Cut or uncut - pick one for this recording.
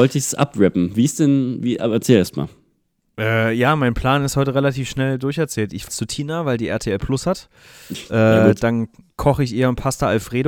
cut